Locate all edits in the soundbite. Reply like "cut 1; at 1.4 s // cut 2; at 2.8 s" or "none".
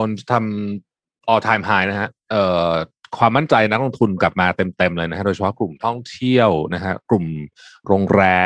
none